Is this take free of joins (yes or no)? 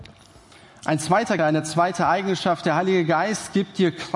no